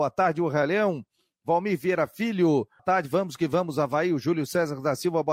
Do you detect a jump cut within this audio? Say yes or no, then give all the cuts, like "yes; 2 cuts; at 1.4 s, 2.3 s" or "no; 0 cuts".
yes; 1 cut; at 2.8 s